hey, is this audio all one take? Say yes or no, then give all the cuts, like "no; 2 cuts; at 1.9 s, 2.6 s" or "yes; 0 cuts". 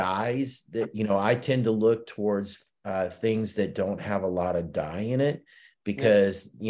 yes; 0 cuts